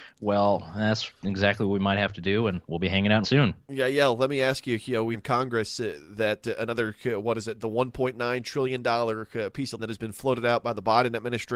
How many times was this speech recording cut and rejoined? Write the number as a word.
three